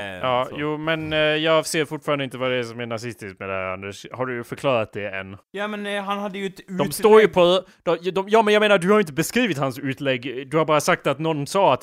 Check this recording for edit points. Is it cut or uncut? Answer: cut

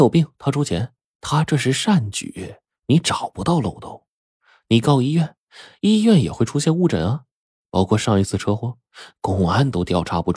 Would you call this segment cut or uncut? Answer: uncut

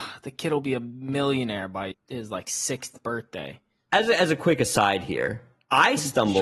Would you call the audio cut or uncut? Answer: cut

